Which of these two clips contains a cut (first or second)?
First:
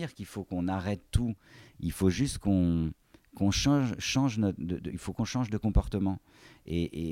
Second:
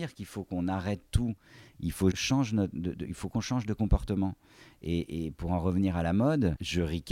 second